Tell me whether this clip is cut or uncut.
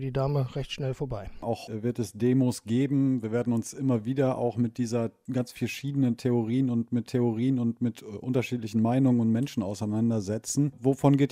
cut